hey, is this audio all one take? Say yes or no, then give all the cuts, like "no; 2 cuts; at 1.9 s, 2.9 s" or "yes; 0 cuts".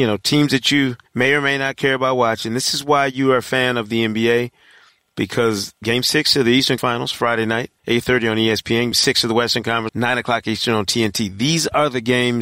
no; 6 cuts; at 1.1 s, 5.8 s, 6.8 s, 7.8 s, 8.9 s, 9.9 s